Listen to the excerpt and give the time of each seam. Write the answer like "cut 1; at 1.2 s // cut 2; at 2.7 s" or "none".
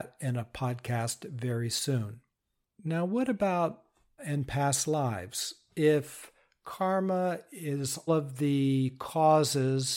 cut 1; at 4.2 s // cut 2; at 8.1 s